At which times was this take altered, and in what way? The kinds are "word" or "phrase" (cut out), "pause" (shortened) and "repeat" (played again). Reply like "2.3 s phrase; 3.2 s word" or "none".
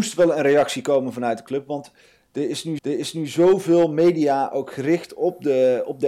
2.8 s repeat